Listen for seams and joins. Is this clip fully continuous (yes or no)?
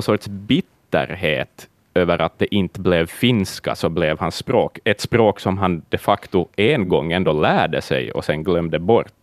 yes